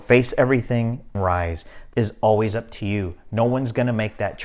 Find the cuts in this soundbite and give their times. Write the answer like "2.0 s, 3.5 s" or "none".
1.1 s, 1.9 s